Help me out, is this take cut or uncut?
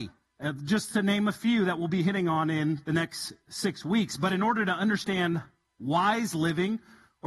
uncut